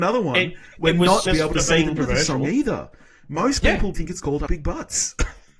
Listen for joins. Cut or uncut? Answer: cut